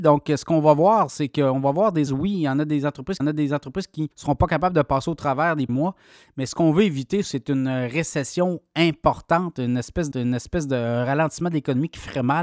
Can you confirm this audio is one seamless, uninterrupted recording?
no; 6 cuts; at 2.1 s, 3.2 s, 4.1 s, 5.7 s, 7.2 s, 10.1 s

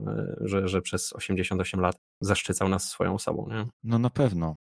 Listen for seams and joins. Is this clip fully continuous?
no; 1 cut; at 3.7 s

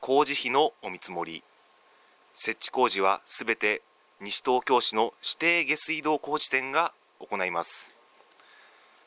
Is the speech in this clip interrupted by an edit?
no; 0 cuts

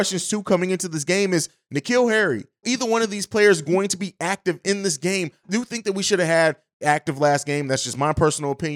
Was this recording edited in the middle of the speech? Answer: yes; 3 cuts; at 2.6 s, 5.4 s, 6.8 s

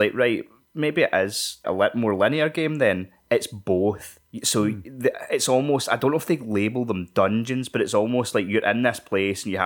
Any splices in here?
yes; 1 cut; at 1.6 s

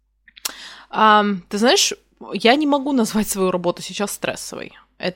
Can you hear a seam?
no; 0 cuts

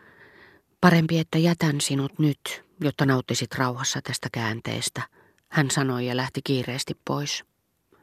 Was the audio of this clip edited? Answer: no; 0 cuts

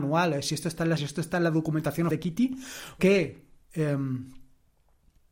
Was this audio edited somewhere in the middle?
yes; 3 cuts; at 1.0 s, 2.1 s, 3.0 s

